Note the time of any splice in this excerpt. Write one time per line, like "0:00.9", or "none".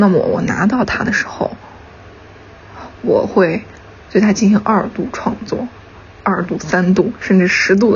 none